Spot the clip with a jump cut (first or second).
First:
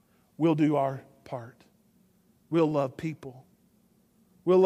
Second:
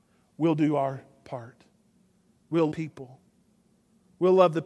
second